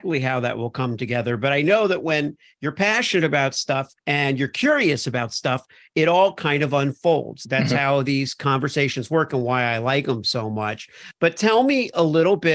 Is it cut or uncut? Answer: cut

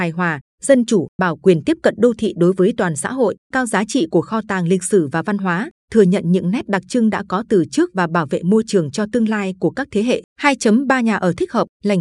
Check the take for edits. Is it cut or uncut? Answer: cut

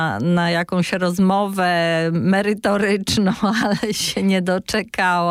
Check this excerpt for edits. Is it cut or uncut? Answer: uncut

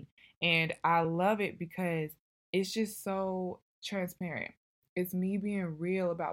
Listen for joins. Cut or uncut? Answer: uncut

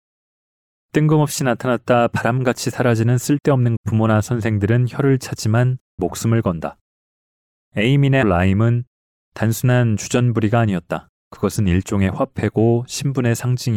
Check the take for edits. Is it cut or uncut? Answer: cut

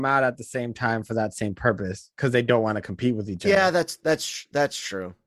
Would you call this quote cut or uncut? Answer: uncut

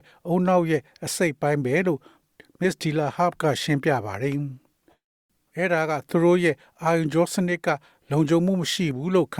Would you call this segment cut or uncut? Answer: uncut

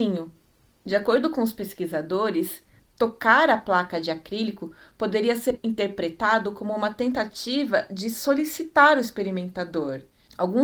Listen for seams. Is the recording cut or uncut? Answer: uncut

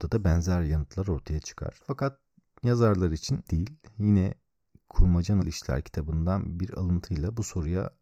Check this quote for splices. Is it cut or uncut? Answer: cut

